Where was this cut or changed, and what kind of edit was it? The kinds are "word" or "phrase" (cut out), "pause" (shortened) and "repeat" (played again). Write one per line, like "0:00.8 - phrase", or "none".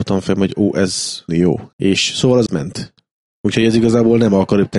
0:01.3 - word
0:01.7 - pause
0:02.5 - phrase